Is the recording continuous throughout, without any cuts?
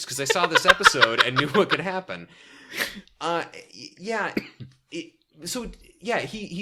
yes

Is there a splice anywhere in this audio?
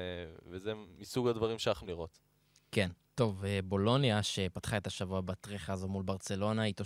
yes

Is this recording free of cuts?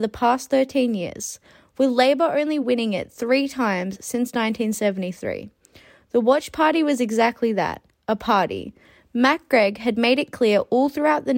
yes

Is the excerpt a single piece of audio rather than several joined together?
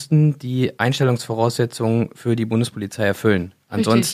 yes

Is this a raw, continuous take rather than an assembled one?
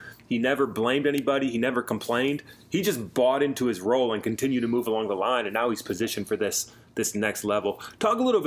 yes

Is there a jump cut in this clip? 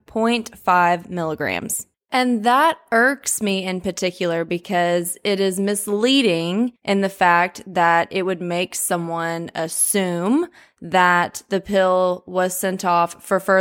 yes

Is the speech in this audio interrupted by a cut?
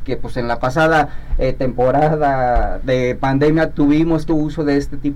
yes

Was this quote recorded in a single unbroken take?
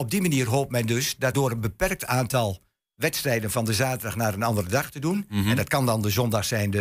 no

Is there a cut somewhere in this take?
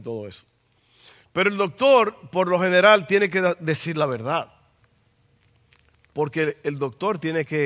no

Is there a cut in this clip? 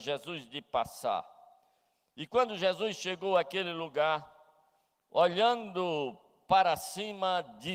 no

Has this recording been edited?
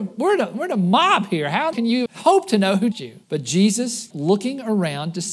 yes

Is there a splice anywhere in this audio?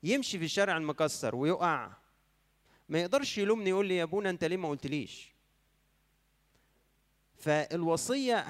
no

